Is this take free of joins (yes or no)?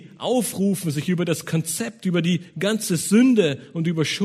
yes